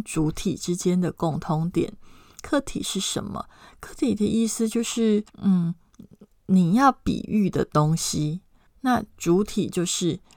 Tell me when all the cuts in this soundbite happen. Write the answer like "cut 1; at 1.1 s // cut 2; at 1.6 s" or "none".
cut 1; at 5.3 s // cut 2; at 8.7 s